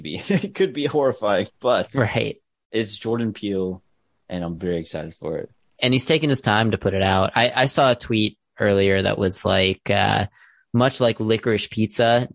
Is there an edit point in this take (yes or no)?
no